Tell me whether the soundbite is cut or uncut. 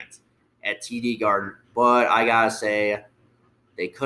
uncut